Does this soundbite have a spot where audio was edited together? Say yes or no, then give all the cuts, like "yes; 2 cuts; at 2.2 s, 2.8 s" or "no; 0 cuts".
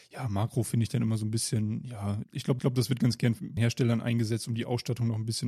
yes; 3 cuts; at 2.2 s, 2.6 s, 3.6 s